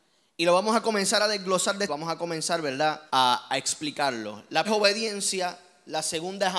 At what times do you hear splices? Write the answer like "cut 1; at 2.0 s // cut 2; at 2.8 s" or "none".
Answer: cut 1; at 1.9 s // cut 2; at 3.1 s // cut 3; at 4.6 s